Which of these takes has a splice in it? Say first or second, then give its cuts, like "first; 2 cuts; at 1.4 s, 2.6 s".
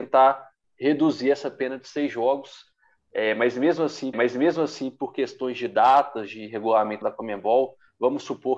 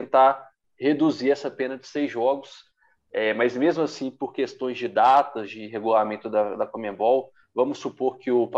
first; 2 cuts; at 4.1 s, 7.0 s